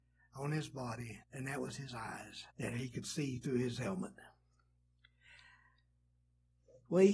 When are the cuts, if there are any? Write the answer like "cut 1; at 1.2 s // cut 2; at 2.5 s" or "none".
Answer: cut 1; at 1.2 s // cut 2; at 2.5 s